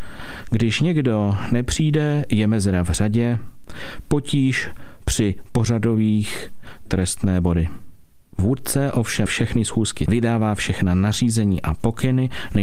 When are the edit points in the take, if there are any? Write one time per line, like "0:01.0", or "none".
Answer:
0:06.9
0:09.3
0:10.1